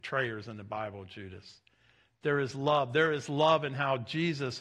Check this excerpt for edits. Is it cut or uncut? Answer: uncut